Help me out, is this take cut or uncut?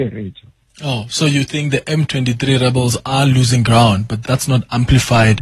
cut